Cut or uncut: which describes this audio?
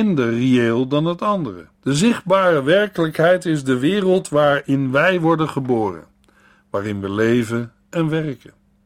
cut